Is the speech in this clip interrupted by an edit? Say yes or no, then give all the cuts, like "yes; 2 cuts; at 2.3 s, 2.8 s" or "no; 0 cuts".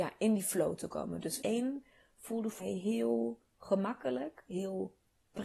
yes; 3 cuts; at 1.4 s, 2.6 s, 3.5 s